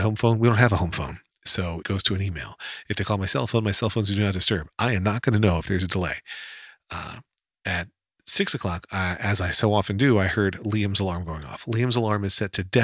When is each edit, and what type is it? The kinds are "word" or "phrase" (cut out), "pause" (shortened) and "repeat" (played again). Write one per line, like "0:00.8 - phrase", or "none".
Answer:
0:01.8 - word